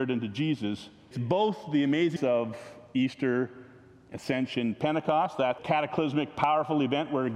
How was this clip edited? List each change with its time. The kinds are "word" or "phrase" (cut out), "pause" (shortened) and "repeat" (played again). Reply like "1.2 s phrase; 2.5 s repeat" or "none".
1.1 s word; 2.2 s word; 5.6 s word